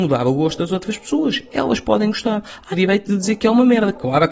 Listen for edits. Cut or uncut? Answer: cut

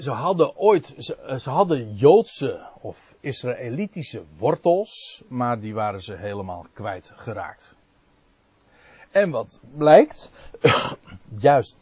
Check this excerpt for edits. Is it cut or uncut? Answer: uncut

